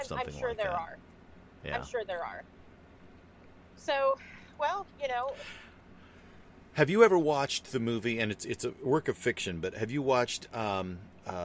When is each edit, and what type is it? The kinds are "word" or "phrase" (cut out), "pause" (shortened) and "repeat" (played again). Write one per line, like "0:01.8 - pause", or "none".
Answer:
0:04.9 - pause